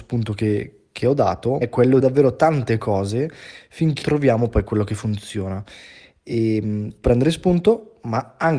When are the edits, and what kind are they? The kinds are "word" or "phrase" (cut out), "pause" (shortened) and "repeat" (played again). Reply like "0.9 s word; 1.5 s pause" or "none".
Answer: 1.6 s word; 2.0 s phrase; 4.0 s word; 7.0 s word